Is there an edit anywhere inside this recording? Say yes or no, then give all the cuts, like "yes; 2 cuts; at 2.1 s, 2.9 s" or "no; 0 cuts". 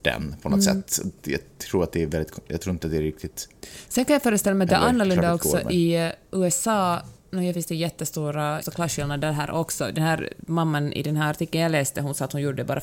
yes; 3 cuts; at 7.2 s, 7.5 s, 8.6 s